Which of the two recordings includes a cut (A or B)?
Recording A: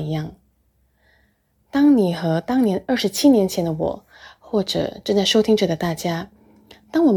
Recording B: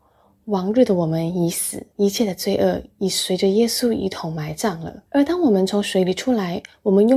B